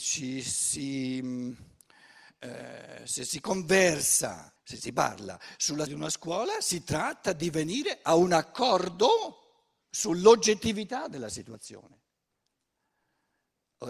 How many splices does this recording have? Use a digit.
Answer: 3